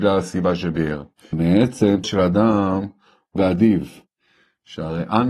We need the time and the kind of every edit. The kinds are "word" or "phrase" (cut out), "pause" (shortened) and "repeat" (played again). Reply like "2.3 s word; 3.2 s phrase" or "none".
1.3 s word; 2.0 s word; 3.4 s phrase